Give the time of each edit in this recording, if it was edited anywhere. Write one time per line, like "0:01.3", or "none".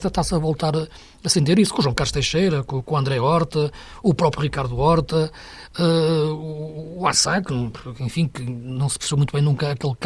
none